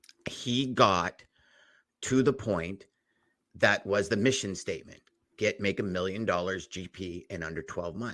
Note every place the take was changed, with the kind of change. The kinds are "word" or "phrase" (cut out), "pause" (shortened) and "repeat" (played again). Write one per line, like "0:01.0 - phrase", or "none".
none